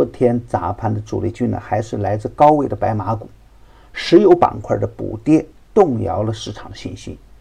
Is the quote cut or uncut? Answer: uncut